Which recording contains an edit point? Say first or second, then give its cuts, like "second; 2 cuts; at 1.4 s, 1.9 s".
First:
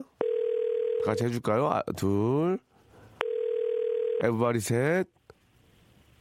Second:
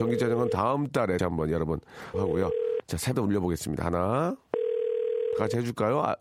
second; 3 cuts; at 1.2 s, 2.1 s, 3.1 s